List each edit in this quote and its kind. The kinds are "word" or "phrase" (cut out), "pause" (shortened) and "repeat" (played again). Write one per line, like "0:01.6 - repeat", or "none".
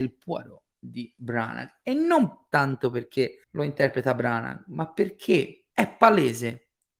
0:03.4 - pause
0:05.7 - pause